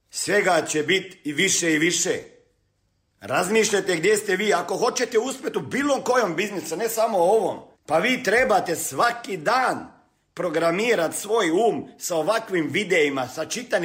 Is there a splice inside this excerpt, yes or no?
yes